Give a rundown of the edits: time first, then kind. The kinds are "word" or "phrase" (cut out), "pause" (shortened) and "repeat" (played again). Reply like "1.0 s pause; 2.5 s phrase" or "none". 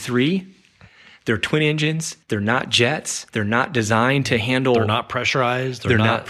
2.2 s pause; 3.3 s pause